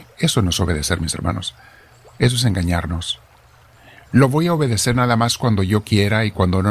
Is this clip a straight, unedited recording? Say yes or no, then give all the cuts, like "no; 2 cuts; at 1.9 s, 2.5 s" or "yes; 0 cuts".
yes; 0 cuts